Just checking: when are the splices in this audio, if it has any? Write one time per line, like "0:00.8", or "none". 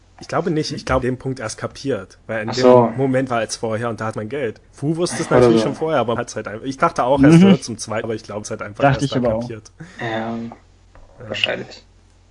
0:01.0
0:02.2
0:03.3
0:04.1
0:04.6
0:06.2
0:08.0
0:08.4